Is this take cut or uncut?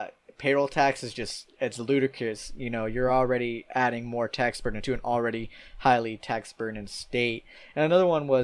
uncut